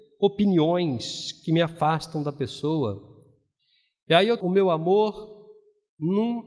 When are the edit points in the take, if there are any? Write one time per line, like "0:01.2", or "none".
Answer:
0:04.4